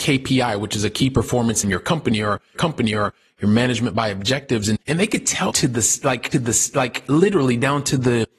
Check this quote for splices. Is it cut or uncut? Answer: cut